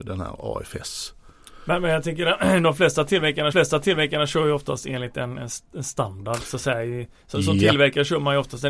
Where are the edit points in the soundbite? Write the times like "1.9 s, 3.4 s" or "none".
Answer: 3.5 s